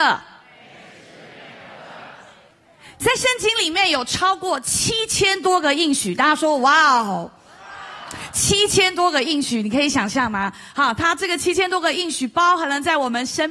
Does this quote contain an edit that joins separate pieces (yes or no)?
no